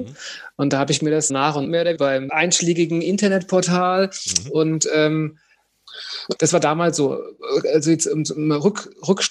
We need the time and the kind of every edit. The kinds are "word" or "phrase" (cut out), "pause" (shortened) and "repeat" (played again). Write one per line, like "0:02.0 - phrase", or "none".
0:01.3 - word
0:01.6 - phrase
0:02.0 - word
0:02.3 - word
0:06.4 - word